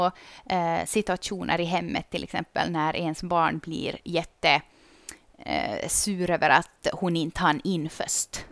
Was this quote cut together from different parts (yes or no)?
no